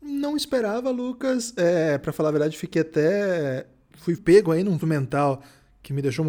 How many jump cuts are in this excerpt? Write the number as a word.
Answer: two